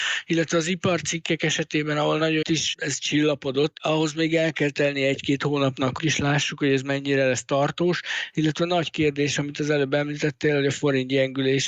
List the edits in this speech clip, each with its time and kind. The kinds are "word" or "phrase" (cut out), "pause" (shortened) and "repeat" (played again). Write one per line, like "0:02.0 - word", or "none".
0:02.4 - phrase
0:06.0 - phrase

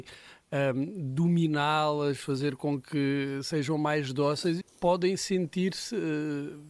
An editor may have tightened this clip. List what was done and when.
0:04.6 - phrase

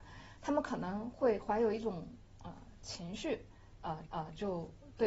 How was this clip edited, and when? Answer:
0:04.1 - repeat

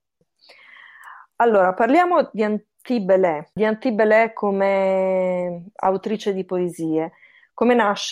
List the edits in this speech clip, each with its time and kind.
0:03.5 - pause

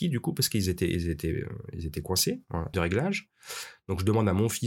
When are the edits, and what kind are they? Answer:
0:02.7 - phrase

